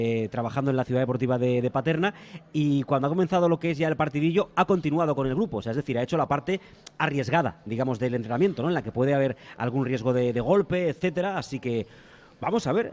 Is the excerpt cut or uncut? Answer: uncut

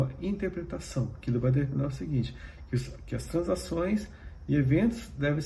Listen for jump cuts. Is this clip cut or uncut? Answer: uncut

